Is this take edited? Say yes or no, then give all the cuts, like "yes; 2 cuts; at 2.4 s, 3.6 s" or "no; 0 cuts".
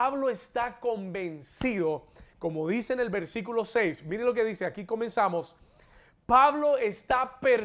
no; 0 cuts